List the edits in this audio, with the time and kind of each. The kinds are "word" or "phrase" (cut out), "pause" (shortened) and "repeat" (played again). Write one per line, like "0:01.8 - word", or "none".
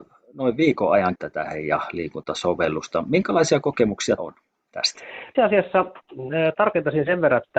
0:01.2 - word
0:01.5 - word
0:04.2 - word
0:05.3 - word